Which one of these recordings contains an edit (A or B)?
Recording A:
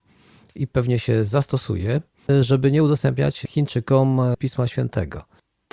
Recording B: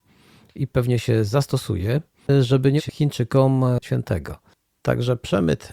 B